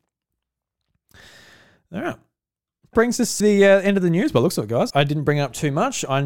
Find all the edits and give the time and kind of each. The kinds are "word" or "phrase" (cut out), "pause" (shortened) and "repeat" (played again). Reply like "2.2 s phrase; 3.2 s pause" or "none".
2.9 s word; 3.4 s word; 4.9 s word